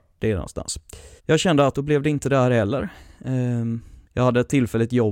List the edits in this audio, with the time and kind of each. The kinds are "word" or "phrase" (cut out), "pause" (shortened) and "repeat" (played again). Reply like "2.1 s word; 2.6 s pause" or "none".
1.2 s pause; 1.7 s phrase; 4.0 s pause